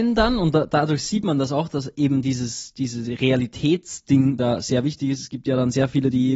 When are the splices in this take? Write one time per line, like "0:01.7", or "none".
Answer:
none

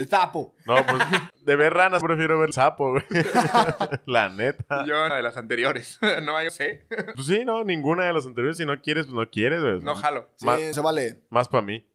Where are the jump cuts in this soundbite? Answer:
0:01.3
0:02.0
0:02.5
0:05.1
0:06.5
0:07.1
0:10.7

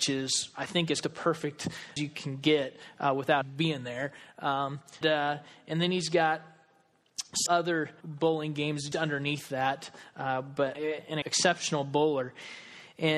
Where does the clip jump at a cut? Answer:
0:01.0
0:02.0
0:03.4
0:05.0
0:07.5
0:08.0
0:08.9
0:10.7
0:11.2

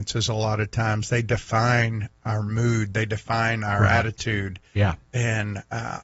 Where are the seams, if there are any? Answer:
none

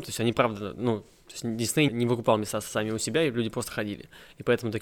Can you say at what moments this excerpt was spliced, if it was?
0:01.9

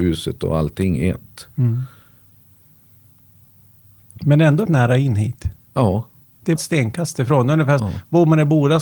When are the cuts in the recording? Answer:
0:04.7
0:06.6
0:07.8

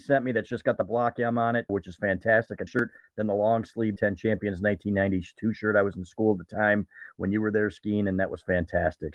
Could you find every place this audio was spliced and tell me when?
0:01.7
0:02.7
0:04.0

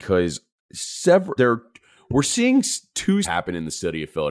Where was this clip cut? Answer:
0:01.4
0:03.2

